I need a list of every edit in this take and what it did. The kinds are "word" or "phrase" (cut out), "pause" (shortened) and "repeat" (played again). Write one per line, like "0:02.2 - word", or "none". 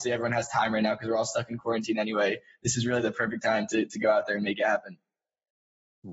none